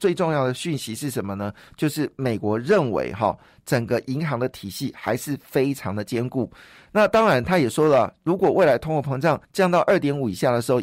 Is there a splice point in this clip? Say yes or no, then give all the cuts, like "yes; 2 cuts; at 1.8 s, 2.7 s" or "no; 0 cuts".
yes; 1 cut; at 9.4 s